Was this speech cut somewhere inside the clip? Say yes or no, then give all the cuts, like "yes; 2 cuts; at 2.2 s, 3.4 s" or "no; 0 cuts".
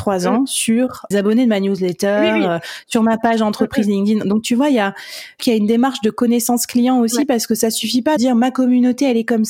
yes; 3 cuts; at 1.1 s, 5.4 s, 8.2 s